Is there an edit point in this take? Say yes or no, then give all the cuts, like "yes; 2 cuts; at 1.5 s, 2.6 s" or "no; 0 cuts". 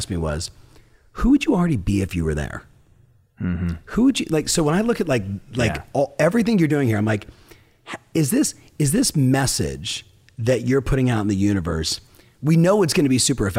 no; 0 cuts